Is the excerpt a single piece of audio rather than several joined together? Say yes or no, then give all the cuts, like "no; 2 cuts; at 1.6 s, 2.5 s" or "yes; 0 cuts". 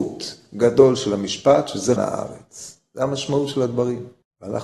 no; 1 cut; at 2.0 s